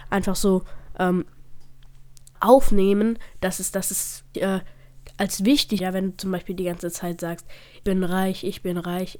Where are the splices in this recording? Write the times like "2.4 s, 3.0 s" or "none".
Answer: 2.4 s, 4.3 s, 5.8 s, 7.8 s